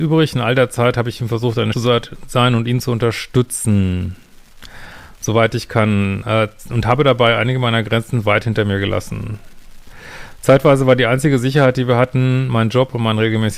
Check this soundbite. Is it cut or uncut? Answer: cut